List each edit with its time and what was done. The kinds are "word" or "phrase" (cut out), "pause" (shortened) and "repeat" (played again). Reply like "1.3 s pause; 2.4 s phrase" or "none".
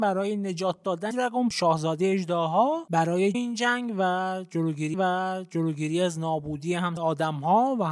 1.1 s word; 1.5 s word; 3.3 s phrase; 4.9 s repeat; 7.0 s phrase